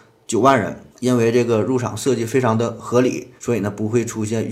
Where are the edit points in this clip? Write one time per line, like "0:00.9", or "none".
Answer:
0:00.9
0:03.4